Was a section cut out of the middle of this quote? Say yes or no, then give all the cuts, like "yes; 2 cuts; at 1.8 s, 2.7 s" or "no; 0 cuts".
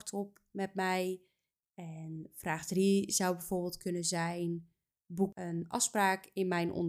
no; 0 cuts